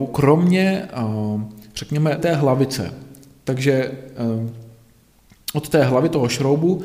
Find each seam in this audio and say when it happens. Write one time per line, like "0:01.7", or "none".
0:02.2

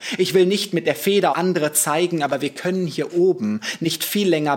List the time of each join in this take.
0:01.3

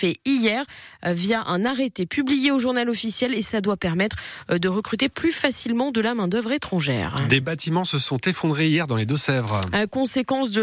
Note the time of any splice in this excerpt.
none

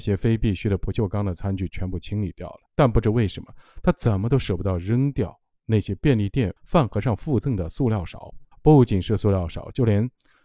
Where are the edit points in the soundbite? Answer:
0:02.7
0:06.6
0:08.5

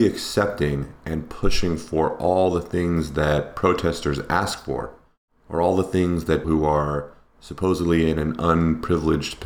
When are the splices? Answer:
0:06.4

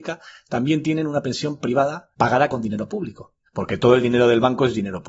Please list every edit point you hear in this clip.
0:02.1
0:03.5

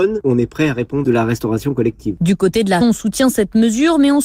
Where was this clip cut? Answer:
0:01.0
0:02.8

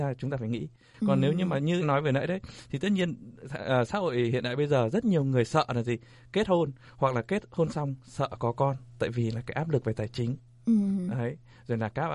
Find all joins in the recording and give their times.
0:01.8

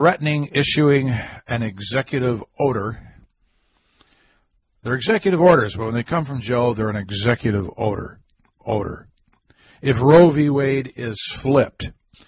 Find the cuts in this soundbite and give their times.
0:08.6

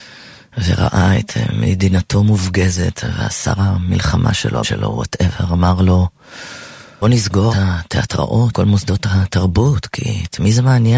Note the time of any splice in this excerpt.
0:04.6
0:07.0
0:07.5
0:08.5

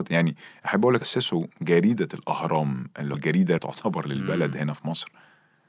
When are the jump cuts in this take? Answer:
0:01.0
0:03.1
0:03.6

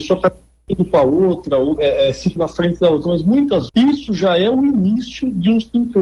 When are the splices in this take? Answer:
0:01.8
0:02.4
0:03.7

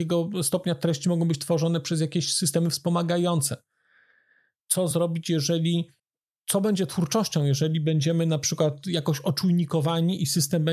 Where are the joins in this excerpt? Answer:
none

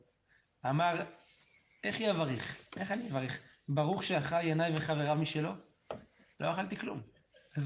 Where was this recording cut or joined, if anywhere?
none

